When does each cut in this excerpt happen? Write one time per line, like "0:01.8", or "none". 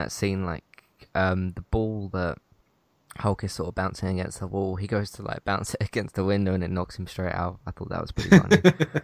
none